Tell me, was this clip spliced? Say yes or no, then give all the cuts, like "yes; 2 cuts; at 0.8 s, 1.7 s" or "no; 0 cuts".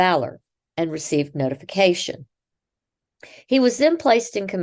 no; 0 cuts